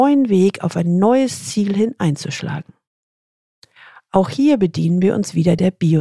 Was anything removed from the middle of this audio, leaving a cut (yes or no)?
no